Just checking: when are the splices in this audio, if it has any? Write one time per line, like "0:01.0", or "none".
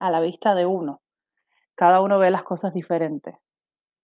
none

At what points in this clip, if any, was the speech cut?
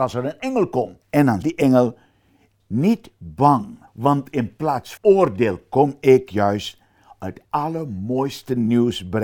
0:01.0
0:01.4
0:02.6
0:03.9
0:05.0
0:07.4

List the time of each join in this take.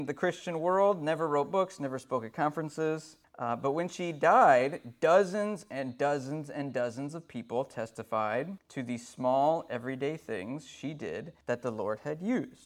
0:11.4

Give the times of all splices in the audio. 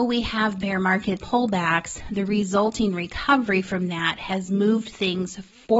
0:01.2

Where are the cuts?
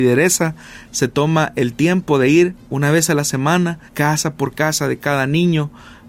0:03.9

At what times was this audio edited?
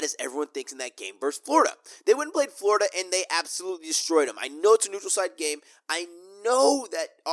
none

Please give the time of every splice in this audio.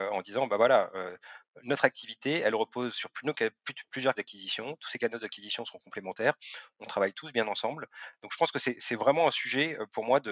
0:04.2

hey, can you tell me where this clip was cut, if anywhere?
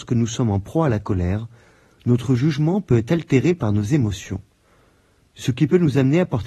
none

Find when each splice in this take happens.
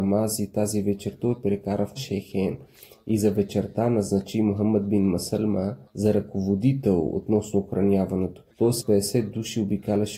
0:02.0
0:05.9
0:08.5
0:08.8

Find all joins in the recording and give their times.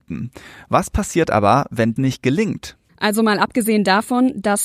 0:02.0
0:02.8

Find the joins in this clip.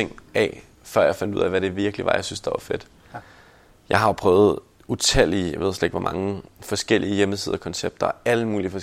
none

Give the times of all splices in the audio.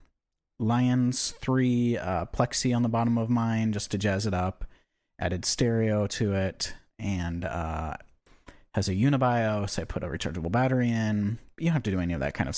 none

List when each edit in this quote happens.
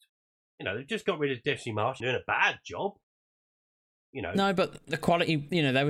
0:02.0

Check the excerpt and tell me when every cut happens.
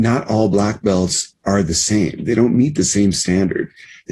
none

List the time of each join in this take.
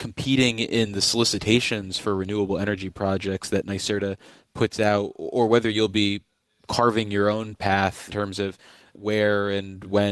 0:08.1

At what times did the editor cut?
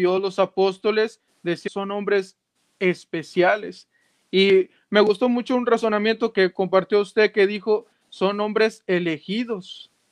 0:01.7
0:06.3

